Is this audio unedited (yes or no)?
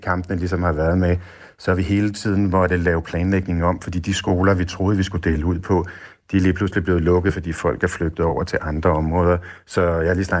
yes